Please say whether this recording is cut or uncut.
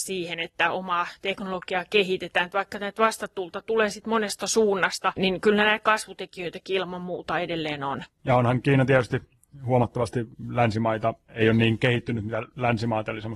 cut